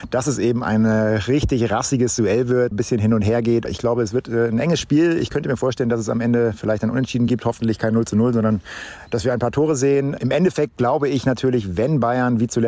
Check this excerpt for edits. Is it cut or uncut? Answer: uncut